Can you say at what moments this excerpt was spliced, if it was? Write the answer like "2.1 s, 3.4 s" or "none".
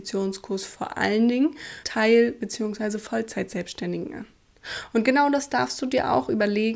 1.8 s